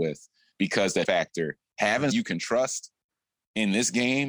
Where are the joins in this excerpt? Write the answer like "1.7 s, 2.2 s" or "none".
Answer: 1.0 s, 2.1 s